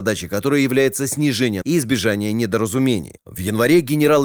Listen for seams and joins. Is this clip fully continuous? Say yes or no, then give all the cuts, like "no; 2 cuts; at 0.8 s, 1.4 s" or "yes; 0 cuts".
no; 1 cut; at 1.6 s